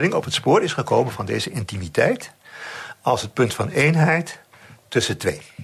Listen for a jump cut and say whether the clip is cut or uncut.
uncut